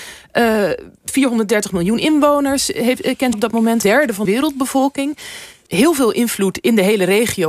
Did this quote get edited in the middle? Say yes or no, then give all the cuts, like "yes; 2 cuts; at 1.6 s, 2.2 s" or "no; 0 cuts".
yes; 4 cuts; at 3.3 s, 3.8 s, 4.3 s, 5.7 s